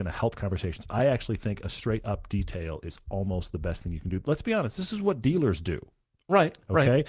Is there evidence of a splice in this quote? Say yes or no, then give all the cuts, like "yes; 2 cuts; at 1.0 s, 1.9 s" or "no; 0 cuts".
no; 0 cuts